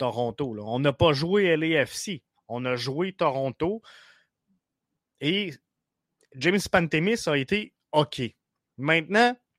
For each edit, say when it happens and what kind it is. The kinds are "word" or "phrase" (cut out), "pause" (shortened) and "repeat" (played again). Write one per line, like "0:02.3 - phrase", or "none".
none